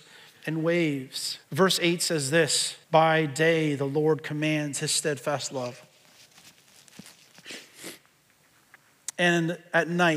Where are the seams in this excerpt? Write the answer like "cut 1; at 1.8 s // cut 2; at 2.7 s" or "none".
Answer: cut 1; at 1.4 s // cut 2; at 2.8 s